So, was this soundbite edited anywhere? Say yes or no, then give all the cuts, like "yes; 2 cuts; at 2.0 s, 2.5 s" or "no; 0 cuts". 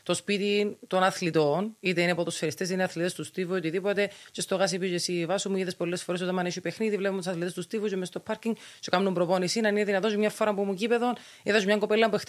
no; 0 cuts